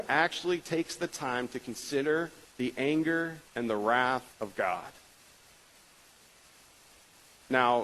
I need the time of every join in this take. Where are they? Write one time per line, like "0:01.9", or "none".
0:02.4
0:03.5
0:04.3